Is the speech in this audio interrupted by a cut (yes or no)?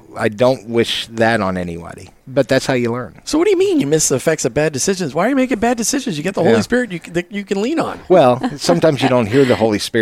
no